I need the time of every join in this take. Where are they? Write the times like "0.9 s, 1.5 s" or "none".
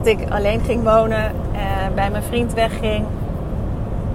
none

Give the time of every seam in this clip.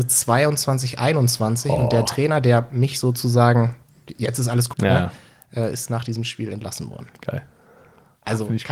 2.1 s, 4.7 s

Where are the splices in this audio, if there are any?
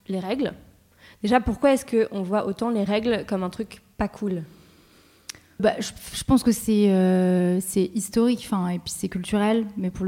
5.6 s

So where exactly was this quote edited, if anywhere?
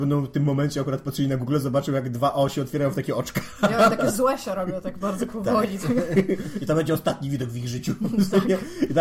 5.0 s

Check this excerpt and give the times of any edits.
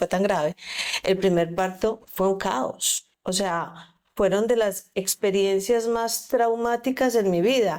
3.1 s

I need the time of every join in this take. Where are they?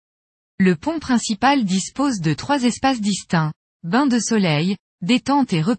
none

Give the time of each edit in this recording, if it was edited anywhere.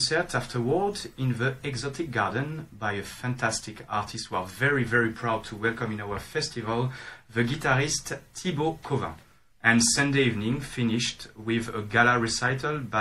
none

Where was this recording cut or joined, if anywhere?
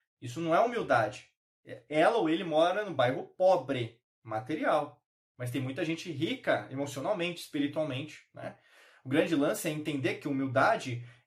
none

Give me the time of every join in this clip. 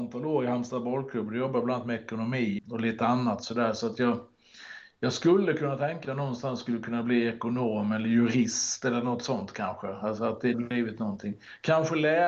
2.6 s, 6.0 s, 10.5 s

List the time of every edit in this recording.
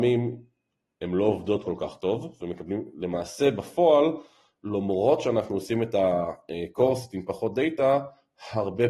none

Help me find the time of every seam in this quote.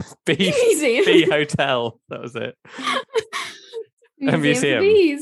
none

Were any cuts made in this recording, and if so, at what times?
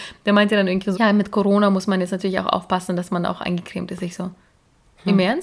0.9 s

